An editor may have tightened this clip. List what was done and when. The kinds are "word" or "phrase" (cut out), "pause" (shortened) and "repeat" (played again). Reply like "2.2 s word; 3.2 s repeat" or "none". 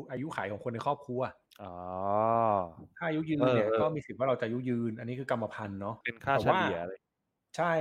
1.5 s pause; 6.0 s pause